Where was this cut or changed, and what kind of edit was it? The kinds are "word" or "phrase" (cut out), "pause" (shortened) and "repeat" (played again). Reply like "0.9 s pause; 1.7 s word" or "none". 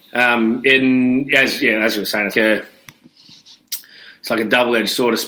2.3 s word